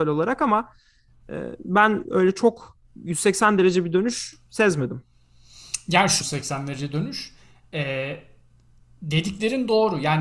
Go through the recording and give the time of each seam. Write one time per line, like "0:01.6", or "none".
0:02.9
0:06.2

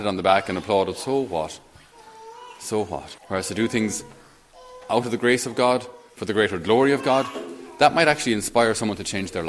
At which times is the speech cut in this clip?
0:03.2

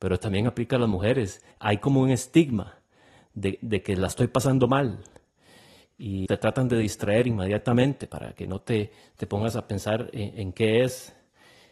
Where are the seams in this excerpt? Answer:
0:01.5
0:06.3

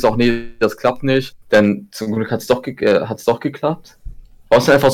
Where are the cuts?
none

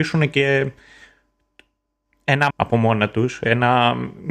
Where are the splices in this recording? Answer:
0:02.5

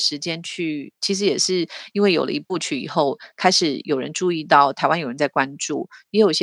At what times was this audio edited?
none

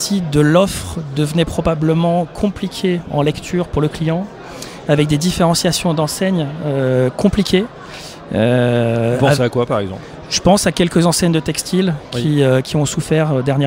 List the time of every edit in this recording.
none

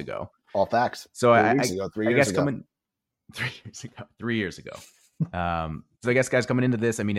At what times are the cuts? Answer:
none

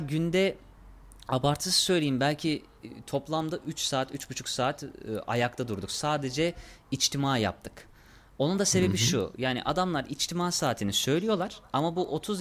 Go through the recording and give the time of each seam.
none

